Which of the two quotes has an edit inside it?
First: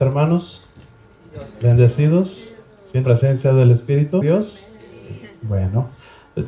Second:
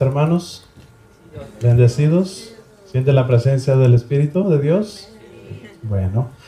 first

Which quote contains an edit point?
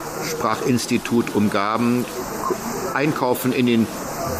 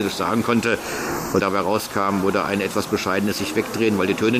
second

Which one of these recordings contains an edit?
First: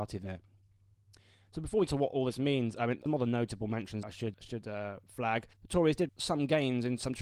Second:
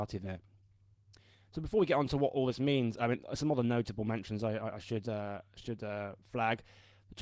first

